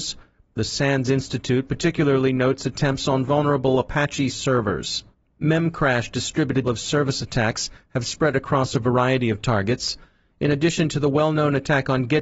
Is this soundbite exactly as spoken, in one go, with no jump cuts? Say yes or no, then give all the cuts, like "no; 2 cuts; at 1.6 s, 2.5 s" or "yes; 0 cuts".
no; 3 cuts; at 4.3 s, 5.1 s, 6.7 s